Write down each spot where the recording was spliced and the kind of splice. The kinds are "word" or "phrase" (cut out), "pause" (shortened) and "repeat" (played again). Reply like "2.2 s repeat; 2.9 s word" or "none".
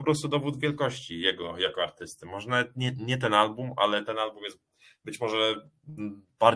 none